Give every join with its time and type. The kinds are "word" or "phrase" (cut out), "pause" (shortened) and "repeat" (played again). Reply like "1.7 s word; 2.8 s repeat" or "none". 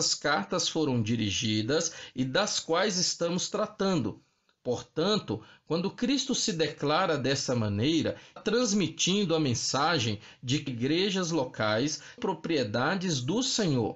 8.4 s word; 10.7 s phrase; 12.2 s word